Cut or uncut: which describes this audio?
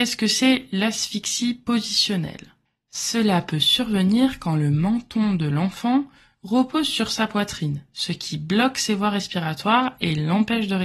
uncut